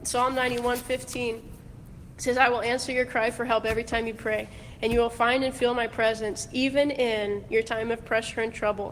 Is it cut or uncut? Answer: uncut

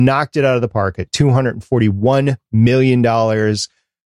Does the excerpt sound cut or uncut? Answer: uncut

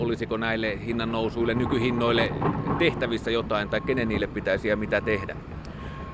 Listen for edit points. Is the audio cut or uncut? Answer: uncut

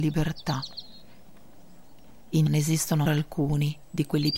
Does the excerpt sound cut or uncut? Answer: cut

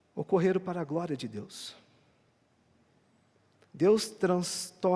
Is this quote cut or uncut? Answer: uncut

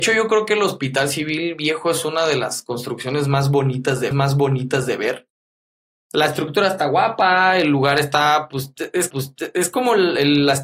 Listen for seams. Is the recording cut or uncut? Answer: cut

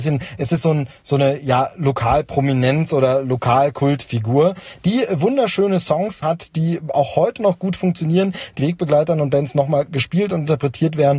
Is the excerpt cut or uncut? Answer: cut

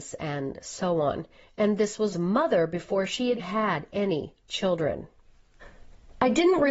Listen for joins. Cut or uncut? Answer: cut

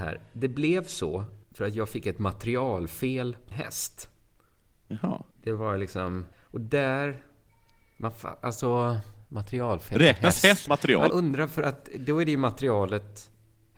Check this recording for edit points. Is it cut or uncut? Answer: cut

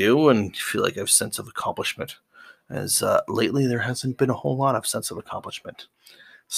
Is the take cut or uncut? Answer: uncut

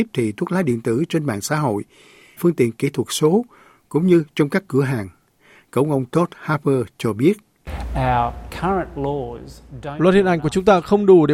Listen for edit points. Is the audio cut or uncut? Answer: cut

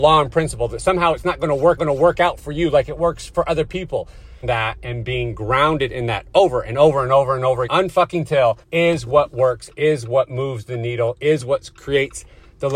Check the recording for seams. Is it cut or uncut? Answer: cut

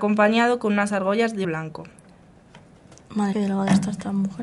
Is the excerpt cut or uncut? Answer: cut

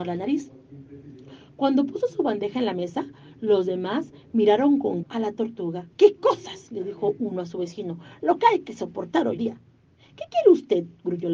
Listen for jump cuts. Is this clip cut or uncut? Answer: cut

